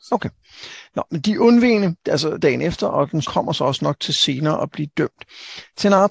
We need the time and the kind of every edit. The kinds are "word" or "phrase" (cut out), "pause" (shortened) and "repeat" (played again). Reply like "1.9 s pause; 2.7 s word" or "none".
2.4 s phrase; 3.2 s word; 4.7 s phrase